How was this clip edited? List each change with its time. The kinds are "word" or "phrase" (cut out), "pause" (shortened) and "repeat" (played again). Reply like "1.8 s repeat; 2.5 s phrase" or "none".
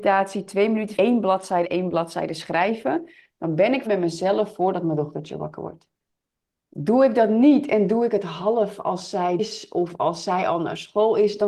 1.0 s word; 1.6 s word; 3.9 s word; 6.1 s pause; 9.4 s word